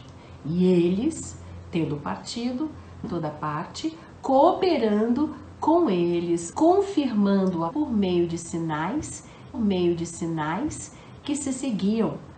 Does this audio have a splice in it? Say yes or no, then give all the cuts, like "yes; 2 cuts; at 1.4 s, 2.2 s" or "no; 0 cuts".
yes; 4 cuts; at 3.0 s, 6.5 s, 7.7 s, 9.5 s